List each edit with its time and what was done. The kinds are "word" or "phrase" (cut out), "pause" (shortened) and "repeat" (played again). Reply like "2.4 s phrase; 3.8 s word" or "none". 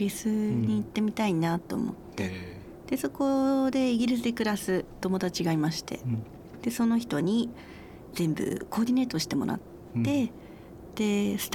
none